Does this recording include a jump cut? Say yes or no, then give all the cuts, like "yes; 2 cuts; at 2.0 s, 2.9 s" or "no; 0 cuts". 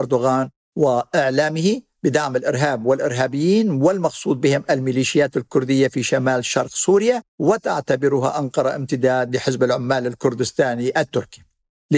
yes; 1 cut; at 7.3 s